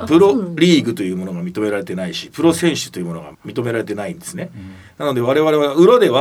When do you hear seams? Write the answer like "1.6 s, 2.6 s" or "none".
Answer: 3.3 s

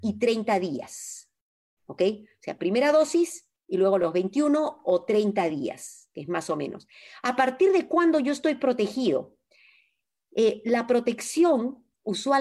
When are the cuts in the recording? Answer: none

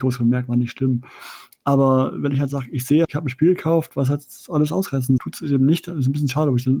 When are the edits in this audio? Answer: 3.0 s, 5.2 s

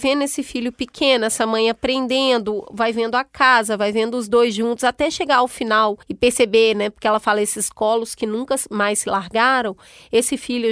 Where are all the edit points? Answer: 6.0 s

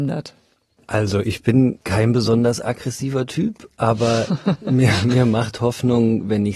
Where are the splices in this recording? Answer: none

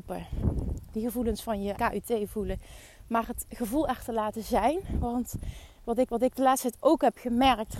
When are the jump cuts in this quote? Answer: 1.7 s, 6.1 s

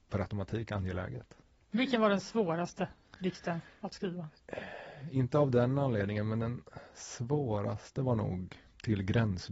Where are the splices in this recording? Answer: none

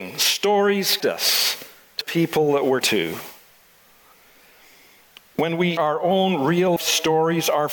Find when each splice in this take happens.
1.0 s, 2.0 s, 2.8 s, 5.8 s, 6.8 s

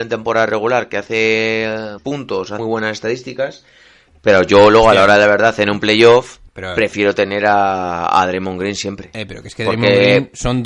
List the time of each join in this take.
2.0 s, 2.6 s, 6.5 s

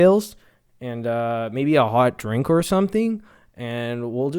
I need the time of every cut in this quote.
none

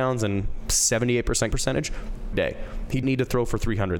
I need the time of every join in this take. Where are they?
1.5 s, 2.3 s, 3.0 s

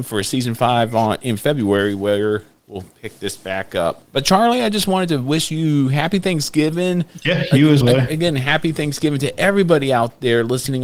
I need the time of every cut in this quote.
4.1 s, 7.8 s

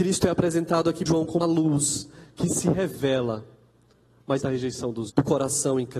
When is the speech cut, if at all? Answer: 1.1 s, 1.4 s, 4.4 s, 5.1 s

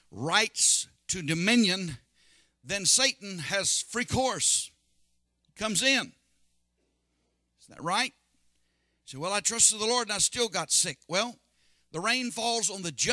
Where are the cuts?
none

